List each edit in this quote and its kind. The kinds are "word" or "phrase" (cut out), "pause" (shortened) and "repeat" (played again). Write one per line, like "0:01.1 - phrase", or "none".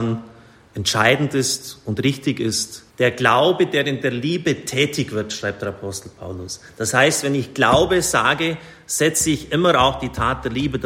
0:02.9 - pause